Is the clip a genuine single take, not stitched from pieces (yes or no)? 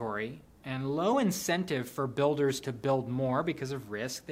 yes